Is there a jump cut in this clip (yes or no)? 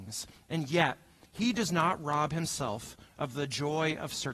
no